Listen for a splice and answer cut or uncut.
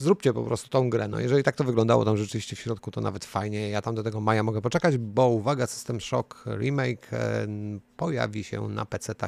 uncut